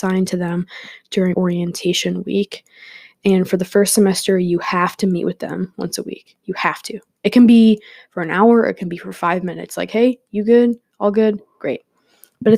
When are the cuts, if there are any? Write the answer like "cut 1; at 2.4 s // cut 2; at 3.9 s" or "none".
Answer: cut 1; at 1.3 s